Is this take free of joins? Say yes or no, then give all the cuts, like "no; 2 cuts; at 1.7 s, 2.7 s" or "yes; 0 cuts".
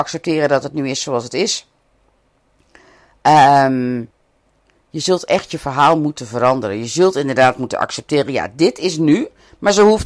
yes; 0 cuts